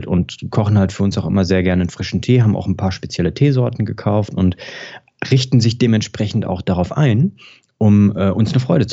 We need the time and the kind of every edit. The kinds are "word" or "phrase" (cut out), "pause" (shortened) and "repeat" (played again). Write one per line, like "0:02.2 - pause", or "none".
none